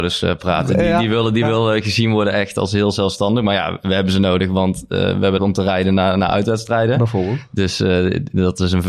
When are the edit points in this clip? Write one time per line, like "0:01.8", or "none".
0:05.4